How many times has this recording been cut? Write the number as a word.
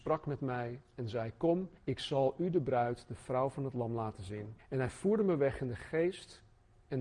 two